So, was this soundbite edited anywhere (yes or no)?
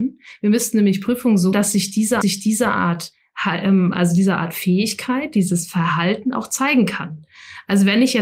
yes